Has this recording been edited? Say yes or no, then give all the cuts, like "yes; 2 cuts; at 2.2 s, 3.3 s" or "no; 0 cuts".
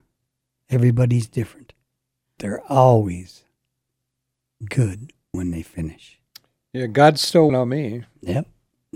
yes; 3 cuts; at 2.4 s, 6.3 s, 7.5 s